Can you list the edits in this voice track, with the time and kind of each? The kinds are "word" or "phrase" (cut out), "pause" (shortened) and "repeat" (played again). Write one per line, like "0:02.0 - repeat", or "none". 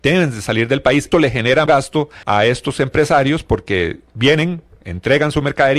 0:01.1 - word
0:01.7 - word
0:02.2 - pause